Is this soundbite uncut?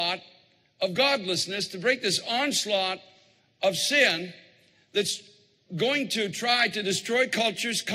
yes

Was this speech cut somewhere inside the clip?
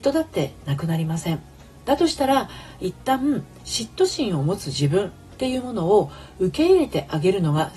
no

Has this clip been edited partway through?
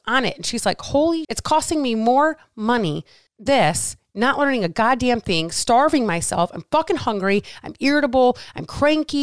yes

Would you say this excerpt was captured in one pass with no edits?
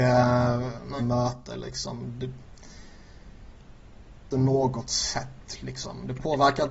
no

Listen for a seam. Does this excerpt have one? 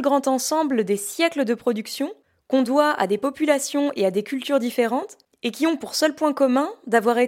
no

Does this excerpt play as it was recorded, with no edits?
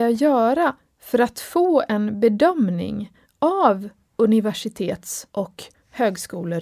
no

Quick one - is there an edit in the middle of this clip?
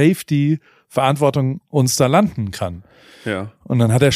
no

